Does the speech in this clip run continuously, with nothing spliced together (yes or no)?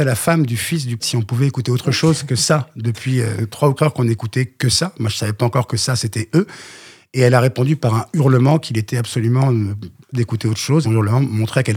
no